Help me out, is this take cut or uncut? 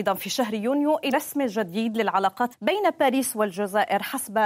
cut